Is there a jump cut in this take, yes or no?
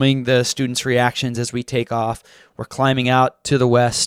no